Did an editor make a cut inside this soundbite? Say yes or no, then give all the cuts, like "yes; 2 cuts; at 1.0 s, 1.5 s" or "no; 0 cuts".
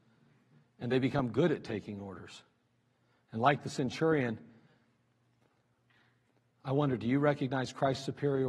no; 0 cuts